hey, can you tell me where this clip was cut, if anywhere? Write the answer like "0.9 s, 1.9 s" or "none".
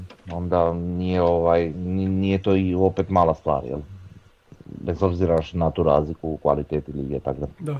none